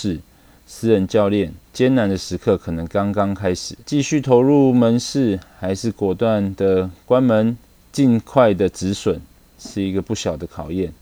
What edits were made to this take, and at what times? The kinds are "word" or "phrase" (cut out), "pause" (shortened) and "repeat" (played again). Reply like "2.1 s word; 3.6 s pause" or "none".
1.6 s pause; 3.8 s pause; 7.7 s pause